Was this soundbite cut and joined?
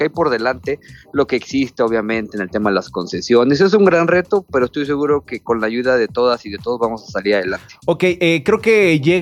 no; 0 cuts

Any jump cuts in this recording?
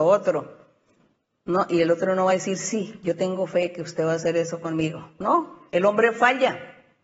no; 0 cuts

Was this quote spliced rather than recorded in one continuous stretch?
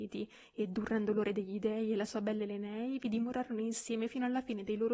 no; 0 cuts

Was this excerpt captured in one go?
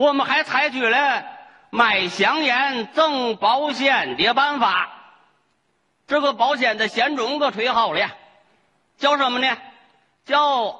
yes; 0 cuts

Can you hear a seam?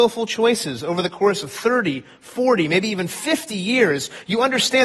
no; 0 cuts

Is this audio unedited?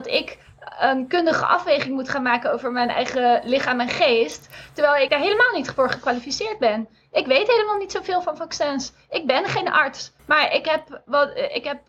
no; 2 cuts; at 5.1 s, 10.2 s

